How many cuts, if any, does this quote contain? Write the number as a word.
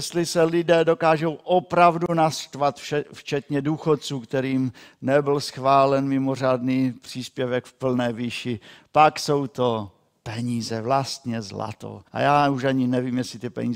one